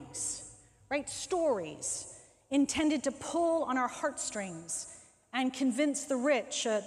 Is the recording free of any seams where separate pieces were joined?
yes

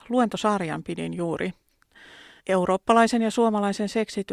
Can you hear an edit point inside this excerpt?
yes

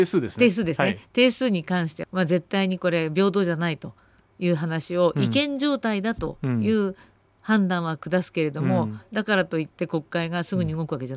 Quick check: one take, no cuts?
no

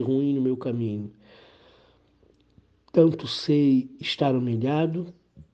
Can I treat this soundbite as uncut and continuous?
yes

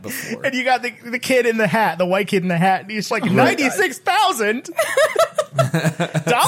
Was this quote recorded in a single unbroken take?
no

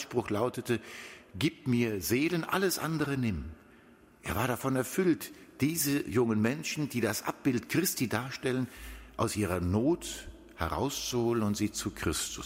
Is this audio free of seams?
yes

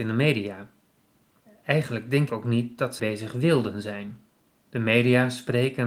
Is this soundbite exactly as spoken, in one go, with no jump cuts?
no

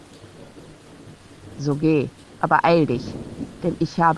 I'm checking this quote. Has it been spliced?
yes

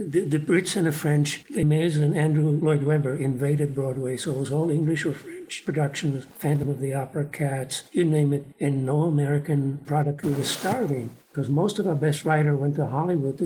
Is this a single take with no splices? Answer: no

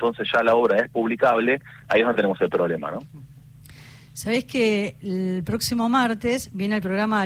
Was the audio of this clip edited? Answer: no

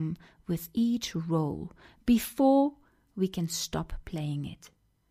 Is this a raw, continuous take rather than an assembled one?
yes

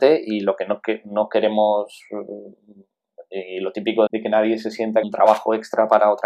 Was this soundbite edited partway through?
yes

